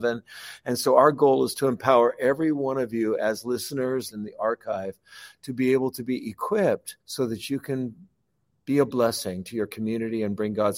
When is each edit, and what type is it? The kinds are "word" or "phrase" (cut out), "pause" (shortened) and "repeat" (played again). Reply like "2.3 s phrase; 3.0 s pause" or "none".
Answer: 4.1 s phrase; 7.0 s pause

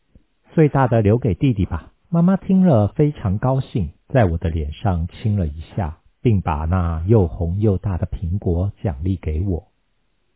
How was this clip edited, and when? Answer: 2.0 s pause; 4.0 s pause; 6.1 s pause

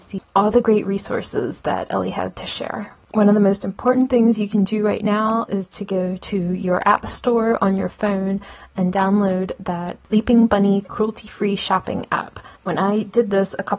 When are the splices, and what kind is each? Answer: 3.0 s pause; 12.6 s pause

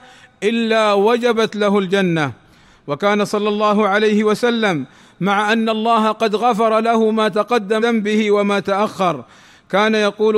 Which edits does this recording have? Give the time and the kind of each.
7.8 s word

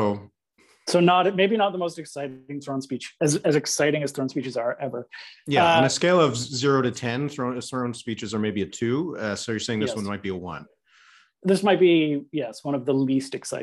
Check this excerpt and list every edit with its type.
none

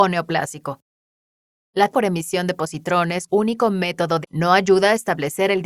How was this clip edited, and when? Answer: 1.9 s word; 3.3 s word; 4.2 s word

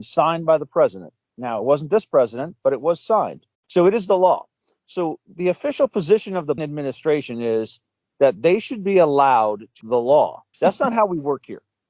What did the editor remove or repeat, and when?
3.5 s pause; 6.6 s word; 9.8 s word; 10.5 s pause

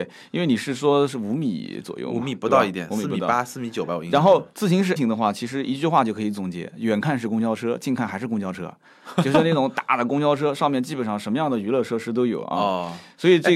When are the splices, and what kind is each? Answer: 5.0 s word

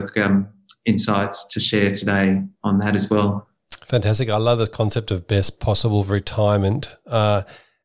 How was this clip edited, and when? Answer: none

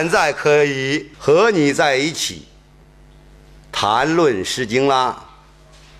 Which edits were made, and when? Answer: 1.1 s pause

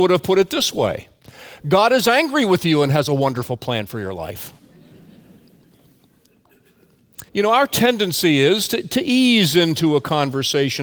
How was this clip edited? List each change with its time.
7.3 s pause

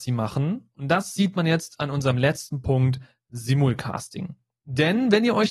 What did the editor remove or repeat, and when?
none

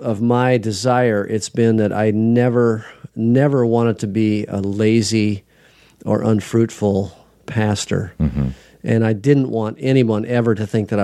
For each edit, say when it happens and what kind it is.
none

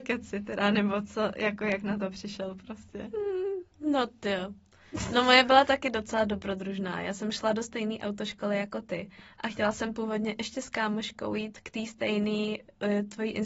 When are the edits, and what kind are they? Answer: 3.7 s pause

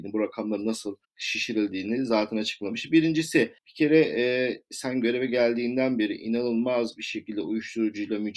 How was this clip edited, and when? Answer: 1.0 s pause; 3.6 s pause

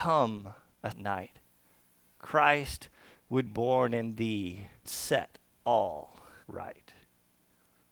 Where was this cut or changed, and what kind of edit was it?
0.9 s word; 3.5 s word; 4.9 s word; 6.4 s word

